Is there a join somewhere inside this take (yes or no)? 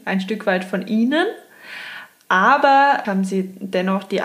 yes